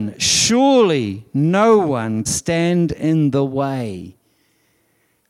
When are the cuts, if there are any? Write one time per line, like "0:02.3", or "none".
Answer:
0:02.3